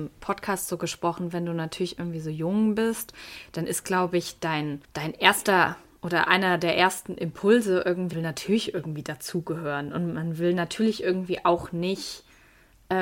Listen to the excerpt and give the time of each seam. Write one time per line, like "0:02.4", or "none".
0:04.8
0:08.1